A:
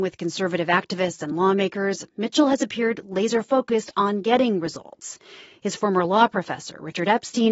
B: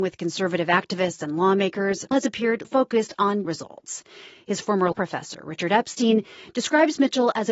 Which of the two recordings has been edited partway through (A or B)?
B